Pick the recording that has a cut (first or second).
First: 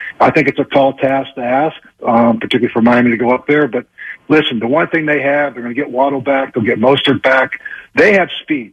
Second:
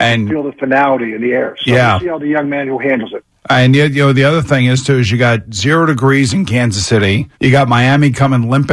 second